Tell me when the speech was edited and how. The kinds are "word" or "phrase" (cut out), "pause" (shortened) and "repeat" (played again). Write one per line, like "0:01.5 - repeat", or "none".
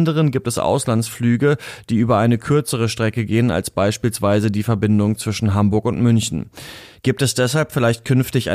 none